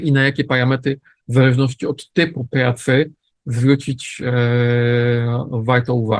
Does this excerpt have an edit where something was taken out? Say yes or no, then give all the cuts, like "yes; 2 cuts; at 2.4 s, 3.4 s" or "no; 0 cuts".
no; 0 cuts